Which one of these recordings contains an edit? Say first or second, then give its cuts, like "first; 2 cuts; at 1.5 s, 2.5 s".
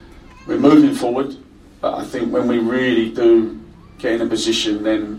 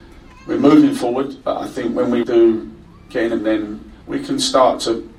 second; 4 cuts; at 1.4 s, 2.2 s, 3.4 s, 4.0 s